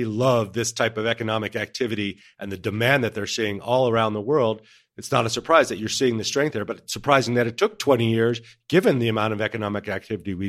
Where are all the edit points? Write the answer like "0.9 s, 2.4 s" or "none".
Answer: none